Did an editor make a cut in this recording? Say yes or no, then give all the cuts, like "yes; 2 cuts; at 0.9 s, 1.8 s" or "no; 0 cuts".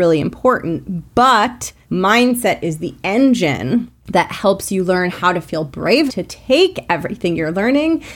yes; 3 cuts; at 1.8 s, 4.0 s, 6.1 s